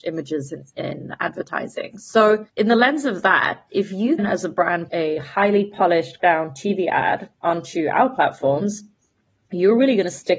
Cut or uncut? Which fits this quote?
cut